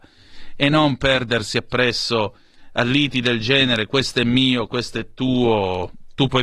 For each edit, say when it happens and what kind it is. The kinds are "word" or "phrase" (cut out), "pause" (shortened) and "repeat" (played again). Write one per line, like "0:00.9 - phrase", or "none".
none

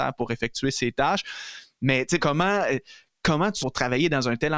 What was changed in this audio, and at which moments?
0:02.2 - word
0:03.6 - word

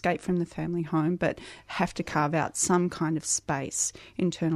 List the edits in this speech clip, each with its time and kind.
none

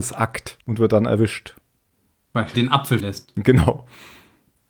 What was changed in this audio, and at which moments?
0:02.5 - word
0:03.0 - word

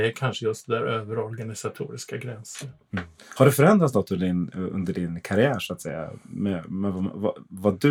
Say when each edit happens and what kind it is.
0:03.2 - pause

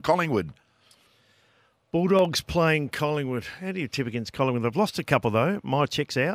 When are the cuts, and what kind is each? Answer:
none

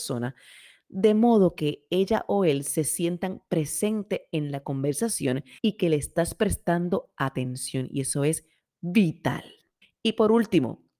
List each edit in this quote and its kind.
0:05.6 - pause
0:09.8 - pause

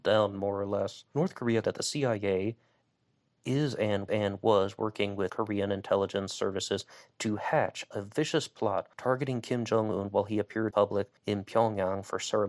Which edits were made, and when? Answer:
0:01.1 - pause
0:01.6 - word
0:04.1 - repeat
0:05.3 - word
0:08.9 - pause
0:10.7 - word
0:11.2 - pause

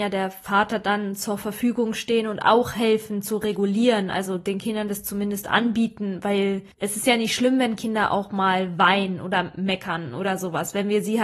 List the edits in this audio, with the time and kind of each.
0:06.7 - pause

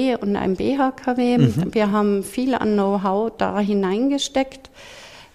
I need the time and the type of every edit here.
none

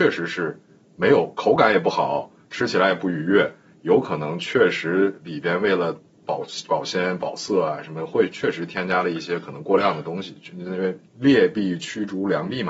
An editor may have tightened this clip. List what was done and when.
0:11.1 - pause

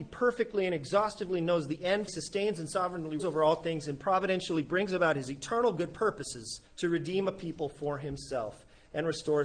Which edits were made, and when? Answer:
0:02.1 - phrase
0:03.2 - word
0:06.7 - pause

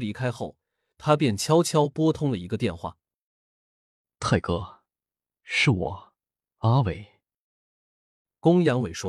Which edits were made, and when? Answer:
none

